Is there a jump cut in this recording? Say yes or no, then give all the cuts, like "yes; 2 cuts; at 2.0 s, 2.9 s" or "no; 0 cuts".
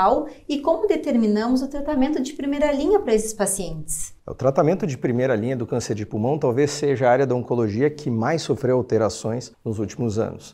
yes; 1 cut; at 9.5 s